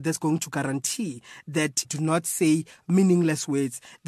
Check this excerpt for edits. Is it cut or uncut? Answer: cut